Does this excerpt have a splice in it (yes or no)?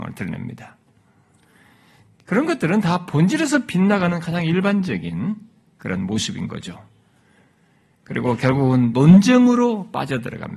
no